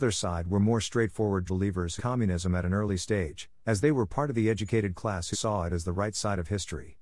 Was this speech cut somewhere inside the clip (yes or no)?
yes